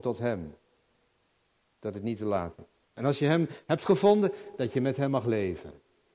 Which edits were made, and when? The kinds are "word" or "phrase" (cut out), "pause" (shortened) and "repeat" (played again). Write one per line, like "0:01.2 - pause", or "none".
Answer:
0:02.9 - pause